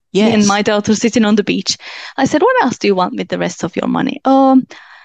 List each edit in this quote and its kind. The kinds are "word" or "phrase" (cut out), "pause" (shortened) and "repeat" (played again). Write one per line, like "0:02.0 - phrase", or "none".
none